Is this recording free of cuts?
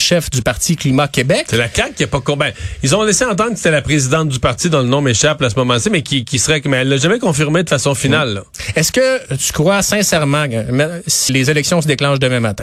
no; 1 cut; at 11.3 s

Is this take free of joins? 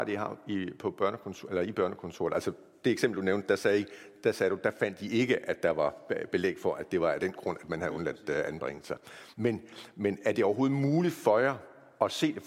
yes; 0 cuts

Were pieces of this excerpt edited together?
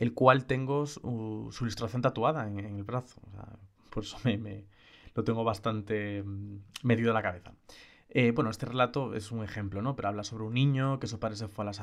no; 0 cuts

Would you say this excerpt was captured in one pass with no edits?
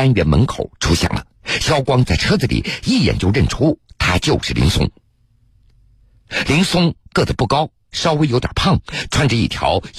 no; 1 cut; at 1.3 s

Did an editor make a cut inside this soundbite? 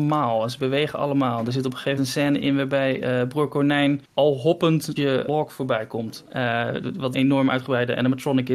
yes; 6 cuts; at 2.0 s, 4.0 s, 5.0 s, 5.3 s, 6.3 s, 7.1 s

